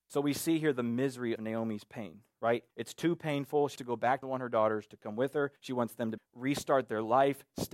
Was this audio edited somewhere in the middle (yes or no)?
yes